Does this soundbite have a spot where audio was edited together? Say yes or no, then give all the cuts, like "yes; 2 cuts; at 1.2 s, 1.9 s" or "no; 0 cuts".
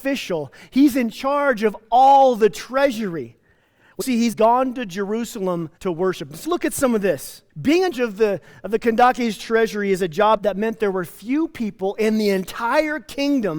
yes; 7 cuts; at 4.0 s, 4.3 s, 5.8 s, 6.4 s, 7.5 s, 7.9 s, 10.4 s